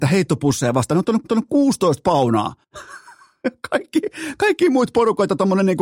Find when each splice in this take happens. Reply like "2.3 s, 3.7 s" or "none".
1.2 s, 2.6 s